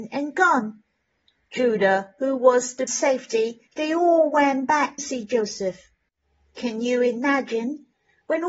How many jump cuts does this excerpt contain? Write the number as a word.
three